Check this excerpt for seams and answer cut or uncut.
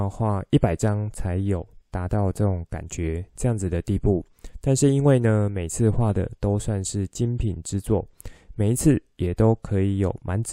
cut